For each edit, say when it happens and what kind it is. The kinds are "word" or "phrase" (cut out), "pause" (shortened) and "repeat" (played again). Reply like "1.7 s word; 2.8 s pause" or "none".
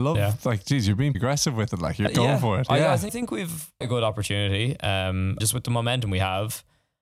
1.1 s word; 2.1 s word; 3.1 s word; 3.8 s word; 5.4 s word